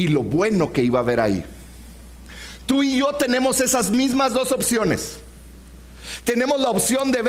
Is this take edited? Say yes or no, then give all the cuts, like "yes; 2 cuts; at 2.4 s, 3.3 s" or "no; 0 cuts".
no; 0 cuts